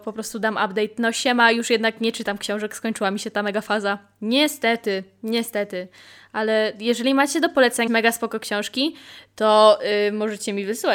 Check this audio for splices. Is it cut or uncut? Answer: cut